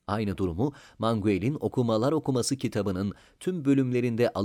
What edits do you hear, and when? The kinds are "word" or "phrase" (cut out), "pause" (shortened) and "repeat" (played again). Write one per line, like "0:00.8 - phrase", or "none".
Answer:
none

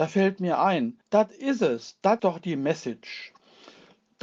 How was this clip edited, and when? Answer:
0:01.0 - pause
0:02.2 - word

